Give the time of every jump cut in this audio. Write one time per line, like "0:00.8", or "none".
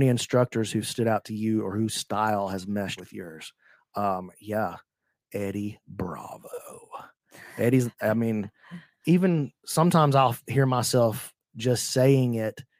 0:03.0
0:09.0